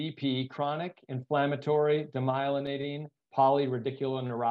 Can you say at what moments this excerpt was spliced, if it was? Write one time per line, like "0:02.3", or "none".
none